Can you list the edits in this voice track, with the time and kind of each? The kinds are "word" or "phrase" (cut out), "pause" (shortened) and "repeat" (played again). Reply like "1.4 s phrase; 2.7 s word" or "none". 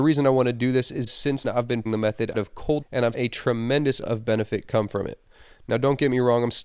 1.1 s word; 1.4 s word; 1.9 s word; 2.3 s word; 2.8 s word; 3.1 s word; 4.0 s word